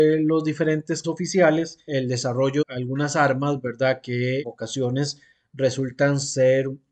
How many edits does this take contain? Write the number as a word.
four